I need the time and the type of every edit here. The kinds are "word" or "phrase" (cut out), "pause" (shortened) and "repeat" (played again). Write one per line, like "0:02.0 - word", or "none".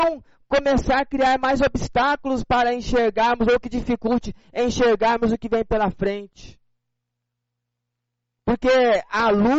none